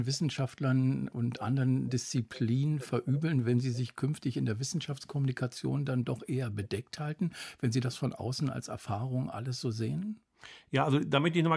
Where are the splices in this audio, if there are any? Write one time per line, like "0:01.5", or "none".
none